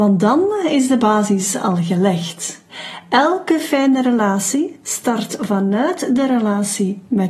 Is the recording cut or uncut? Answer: uncut